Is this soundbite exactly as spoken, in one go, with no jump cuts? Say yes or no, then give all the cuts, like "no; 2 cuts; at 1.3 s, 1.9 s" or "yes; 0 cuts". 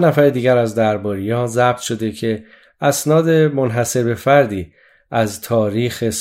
yes; 0 cuts